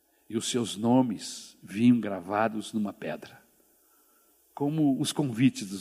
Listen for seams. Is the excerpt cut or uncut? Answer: uncut